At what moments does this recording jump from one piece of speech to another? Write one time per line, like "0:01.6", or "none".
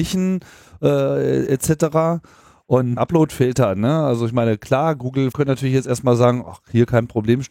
0:03.0
0:05.3